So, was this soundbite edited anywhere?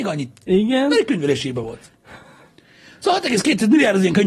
no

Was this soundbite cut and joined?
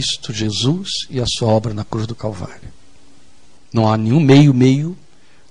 yes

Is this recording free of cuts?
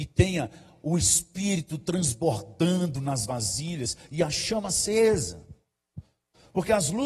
yes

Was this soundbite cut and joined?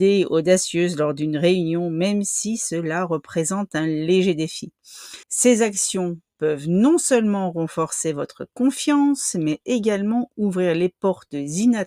yes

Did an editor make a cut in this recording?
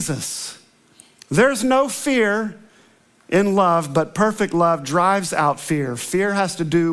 no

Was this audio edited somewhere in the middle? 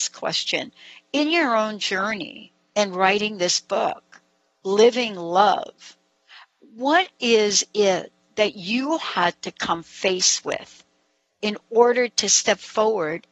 no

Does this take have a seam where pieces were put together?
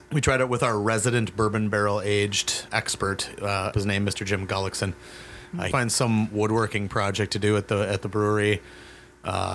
yes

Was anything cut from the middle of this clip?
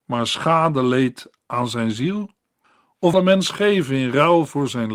yes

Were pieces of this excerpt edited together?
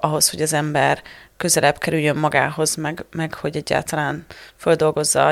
no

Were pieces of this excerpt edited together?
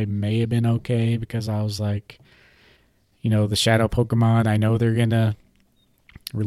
no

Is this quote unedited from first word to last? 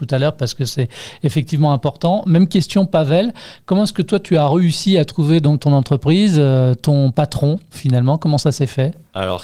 no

